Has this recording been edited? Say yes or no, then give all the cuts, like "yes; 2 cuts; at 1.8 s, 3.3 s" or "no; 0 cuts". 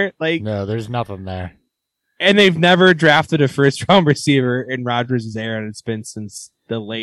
no; 0 cuts